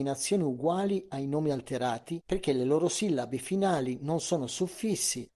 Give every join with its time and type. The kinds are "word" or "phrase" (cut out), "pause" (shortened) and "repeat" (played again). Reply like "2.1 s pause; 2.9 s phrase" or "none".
2.2 s phrase